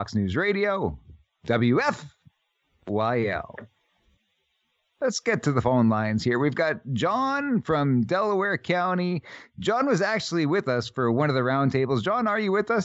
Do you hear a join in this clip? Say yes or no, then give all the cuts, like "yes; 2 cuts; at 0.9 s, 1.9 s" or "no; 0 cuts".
no; 0 cuts